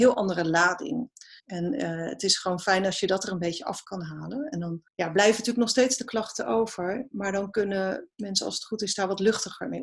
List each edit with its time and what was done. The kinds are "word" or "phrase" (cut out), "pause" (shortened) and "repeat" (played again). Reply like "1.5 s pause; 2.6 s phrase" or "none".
1.4 s pause; 4.9 s pause